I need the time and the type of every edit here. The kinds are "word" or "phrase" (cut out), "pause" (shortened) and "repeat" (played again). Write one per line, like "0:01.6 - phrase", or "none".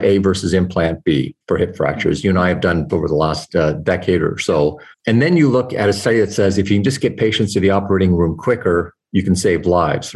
0:01.4 - pause
0:02.9 - word
0:04.9 - pause